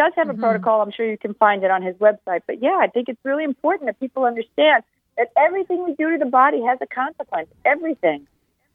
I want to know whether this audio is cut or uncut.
uncut